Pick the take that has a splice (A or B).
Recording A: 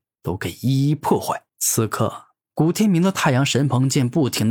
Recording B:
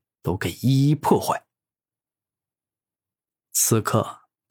A